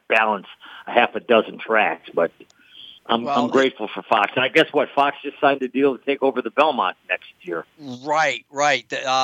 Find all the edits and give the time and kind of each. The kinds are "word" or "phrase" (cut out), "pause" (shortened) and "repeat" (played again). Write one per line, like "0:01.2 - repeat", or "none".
0:03.0 - pause

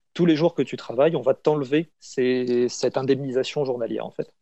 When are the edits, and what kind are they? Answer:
0:01.9 - pause

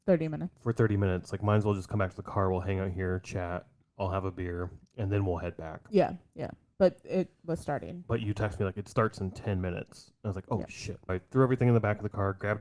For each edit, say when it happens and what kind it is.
0:11.1 - word

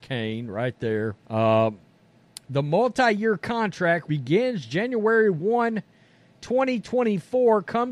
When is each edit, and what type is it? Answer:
0:01.2 - pause
0:04.1 - word

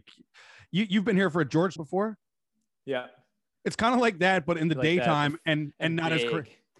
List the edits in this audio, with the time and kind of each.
0:01.8 - phrase

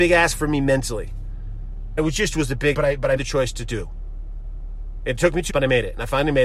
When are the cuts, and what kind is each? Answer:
0:02.0 - word
0:02.7 - word
0:03.2 - word
0:05.5 - word

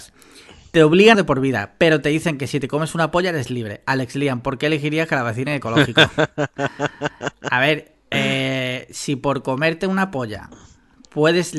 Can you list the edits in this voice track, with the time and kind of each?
0:01.1 - phrase

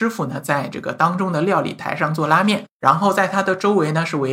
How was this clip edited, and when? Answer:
none

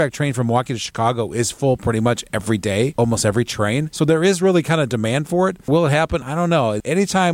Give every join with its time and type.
none

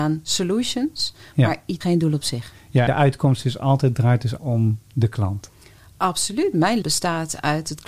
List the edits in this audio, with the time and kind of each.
0:01.8 - word
0:02.9 - word
0:04.4 - word
0:06.8 - word

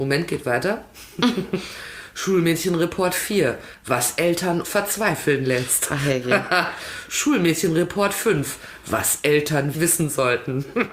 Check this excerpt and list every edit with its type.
0:04.6 - word
0:09.7 - word

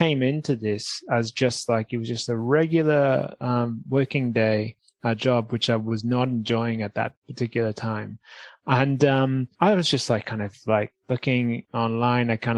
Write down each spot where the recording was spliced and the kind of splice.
0:09.5 - pause

